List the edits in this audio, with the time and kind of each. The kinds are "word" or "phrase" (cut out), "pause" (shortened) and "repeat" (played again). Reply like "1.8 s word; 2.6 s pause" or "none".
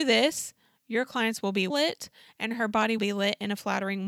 1.7 s word; 3.0 s word